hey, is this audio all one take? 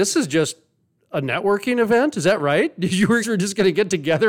no; 1 cut; at 3.2 s

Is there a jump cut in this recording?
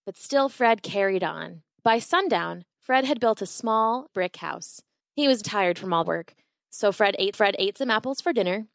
yes; 6 cuts; at 1.7 s, 4.1 s, 5.0 s, 5.4 s, 6.0 s, 7.3 s

